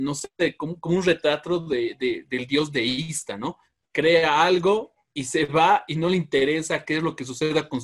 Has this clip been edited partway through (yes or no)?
no